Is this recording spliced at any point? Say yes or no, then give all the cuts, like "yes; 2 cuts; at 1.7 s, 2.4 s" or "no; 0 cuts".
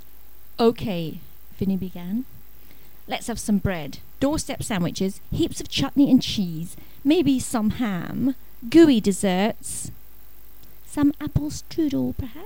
no; 0 cuts